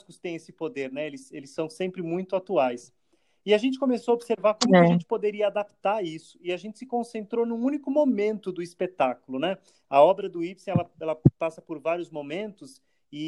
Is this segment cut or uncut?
uncut